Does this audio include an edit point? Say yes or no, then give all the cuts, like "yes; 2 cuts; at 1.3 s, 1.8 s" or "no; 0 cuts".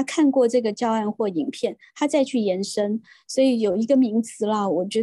no; 0 cuts